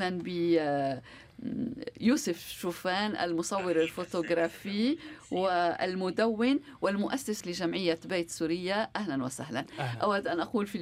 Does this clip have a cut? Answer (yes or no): yes